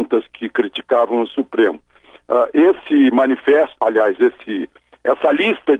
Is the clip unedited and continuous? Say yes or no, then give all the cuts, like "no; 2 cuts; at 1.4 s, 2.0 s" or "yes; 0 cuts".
yes; 0 cuts